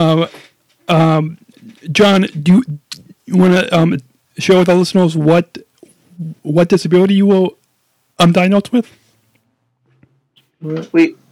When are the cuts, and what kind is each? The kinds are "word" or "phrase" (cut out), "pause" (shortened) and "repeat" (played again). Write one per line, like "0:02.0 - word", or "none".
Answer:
none